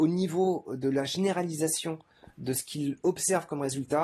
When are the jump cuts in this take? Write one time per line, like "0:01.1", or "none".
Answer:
none